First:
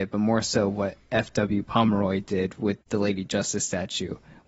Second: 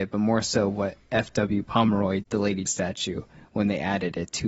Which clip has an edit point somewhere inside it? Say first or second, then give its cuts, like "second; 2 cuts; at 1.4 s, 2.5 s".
second; 2 cuts; at 2.2 s, 2.7 s